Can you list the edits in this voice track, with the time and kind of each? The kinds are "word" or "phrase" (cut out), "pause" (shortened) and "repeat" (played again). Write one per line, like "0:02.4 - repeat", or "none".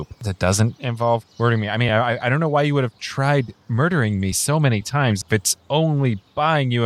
none